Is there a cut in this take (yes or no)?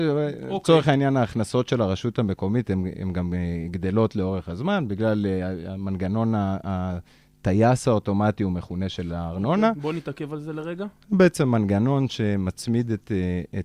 no